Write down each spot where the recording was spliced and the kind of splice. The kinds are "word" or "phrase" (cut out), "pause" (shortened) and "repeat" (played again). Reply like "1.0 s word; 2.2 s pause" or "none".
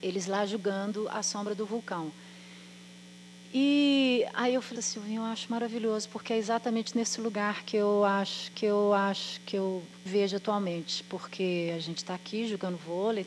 4.8 s word; 8.5 s repeat; 10.1 s phrase

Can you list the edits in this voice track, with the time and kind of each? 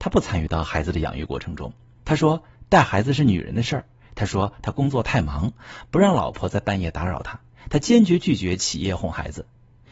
none

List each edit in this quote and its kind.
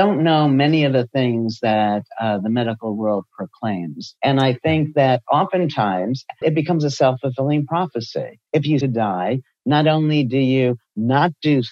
4.2 s pause; 6.4 s word; 8.5 s pause; 8.8 s phrase

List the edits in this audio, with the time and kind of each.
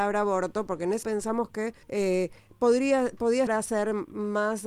1.0 s word; 1.8 s pause; 3.5 s word

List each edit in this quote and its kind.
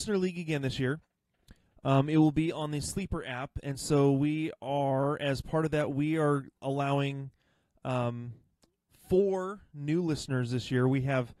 none

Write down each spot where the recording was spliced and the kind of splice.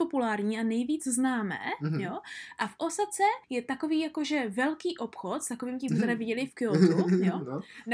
3.4 s pause; 5.9 s phrase

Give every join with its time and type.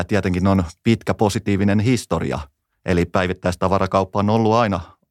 none

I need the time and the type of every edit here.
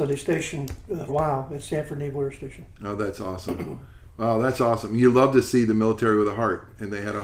1.1 s word

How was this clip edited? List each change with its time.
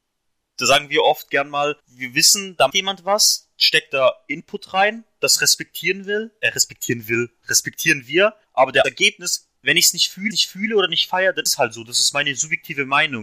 1.8 s pause; 2.7 s word; 6.4 s word; 8.4 s pause; 8.8 s phrase; 9.6 s pause; 10.3 s repeat; 11.5 s word

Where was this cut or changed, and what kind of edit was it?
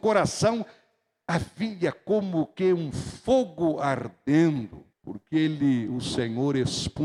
4.9 s pause

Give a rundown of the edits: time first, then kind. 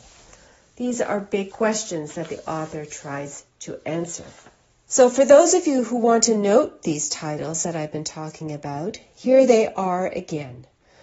1.5 s word; 4.5 s pause

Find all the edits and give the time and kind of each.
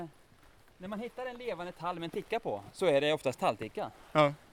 none

